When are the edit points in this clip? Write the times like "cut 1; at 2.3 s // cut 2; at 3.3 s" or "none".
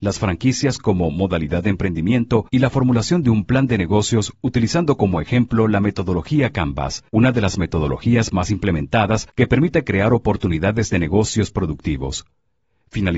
cut 1; at 2.5 s // cut 2; at 7.1 s // cut 3; at 9.3 s